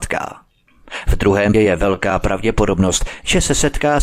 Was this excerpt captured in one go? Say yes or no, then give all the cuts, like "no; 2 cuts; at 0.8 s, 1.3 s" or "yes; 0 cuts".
no; 1 cut; at 1.5 s